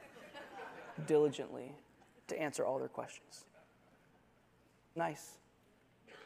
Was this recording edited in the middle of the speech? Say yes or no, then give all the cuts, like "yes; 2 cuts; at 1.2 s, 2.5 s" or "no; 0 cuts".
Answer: yes; 1 cut; at 5.0 s